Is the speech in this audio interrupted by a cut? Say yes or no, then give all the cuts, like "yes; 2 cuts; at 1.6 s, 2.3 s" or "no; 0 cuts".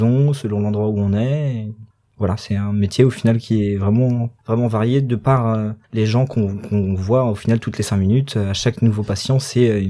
yes; 3 cuts; at 1.9 s, 4.4 s, 5.8 s